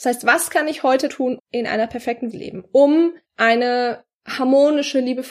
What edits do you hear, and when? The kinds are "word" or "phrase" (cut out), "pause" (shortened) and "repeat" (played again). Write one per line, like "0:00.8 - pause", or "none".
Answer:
0:01.1 - word
0:01.4 - word
0:02.3 - phrase
0:03.2 - pause